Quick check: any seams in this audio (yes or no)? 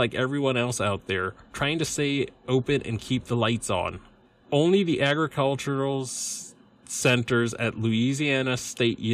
yes